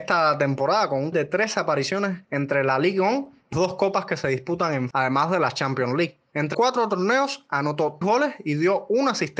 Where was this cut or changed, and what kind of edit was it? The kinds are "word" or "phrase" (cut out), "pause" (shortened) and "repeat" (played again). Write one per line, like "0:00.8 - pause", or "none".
0:01.1 - word
0:03.5 - word
0:04.9 - word
0:06.5 - word
0:08.0 - word